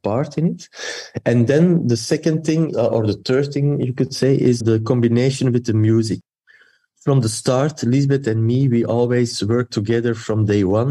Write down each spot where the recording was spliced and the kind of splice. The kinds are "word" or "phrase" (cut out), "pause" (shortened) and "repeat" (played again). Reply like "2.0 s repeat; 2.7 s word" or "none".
2.7 s word; 4.6 s word